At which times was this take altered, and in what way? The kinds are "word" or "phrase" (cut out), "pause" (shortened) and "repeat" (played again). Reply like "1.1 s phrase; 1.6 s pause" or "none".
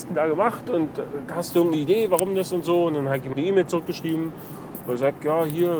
3.3 s word